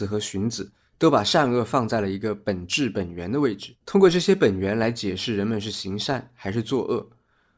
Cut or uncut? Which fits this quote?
cut